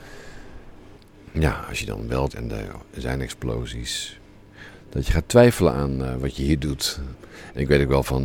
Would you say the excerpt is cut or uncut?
cut